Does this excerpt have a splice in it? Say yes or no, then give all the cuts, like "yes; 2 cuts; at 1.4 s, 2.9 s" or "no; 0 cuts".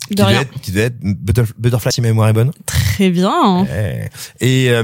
yes; 1 cut; at 1.9 s